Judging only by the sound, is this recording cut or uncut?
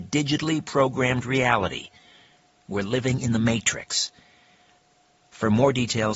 uncut